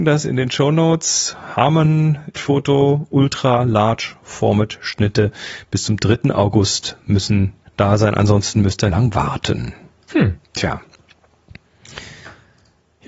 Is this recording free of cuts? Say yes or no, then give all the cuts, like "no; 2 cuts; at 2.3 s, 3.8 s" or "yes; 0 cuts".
no; 4 cuts; at 2.4 s, 7.7 s, 8.9 s, 10.4 s